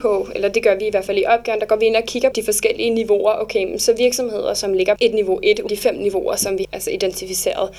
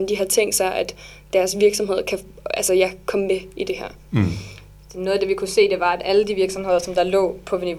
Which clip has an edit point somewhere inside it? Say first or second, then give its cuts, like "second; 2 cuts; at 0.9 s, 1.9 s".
first; 4 cuts; at 2.3 s, 5.0 s, 5.7 s, 6.6 s